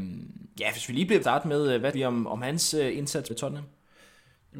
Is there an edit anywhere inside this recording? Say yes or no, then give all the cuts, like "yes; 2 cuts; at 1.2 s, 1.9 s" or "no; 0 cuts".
yes; 3 cuts; at 1.2 s, 1.9 s, 3.3 s